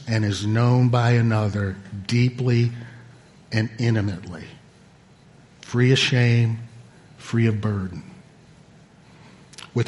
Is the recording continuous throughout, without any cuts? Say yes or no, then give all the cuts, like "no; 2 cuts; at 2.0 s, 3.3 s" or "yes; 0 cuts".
yes; 0 cuts